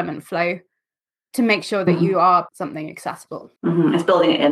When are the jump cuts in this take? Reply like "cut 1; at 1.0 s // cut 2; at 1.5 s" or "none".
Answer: cut 1; at 2.5 s // cut 2; at 3.6 s